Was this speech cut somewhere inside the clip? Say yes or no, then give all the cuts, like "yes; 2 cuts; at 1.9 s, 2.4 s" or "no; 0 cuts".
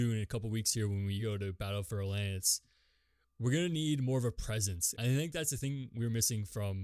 no; 0 cuts